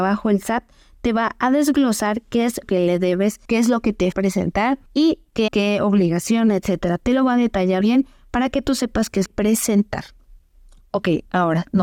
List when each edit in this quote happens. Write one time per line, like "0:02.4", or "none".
0:02.6
0:03.4
0:04.1
0:04.9
0:05.5
0:07.8
0:09.3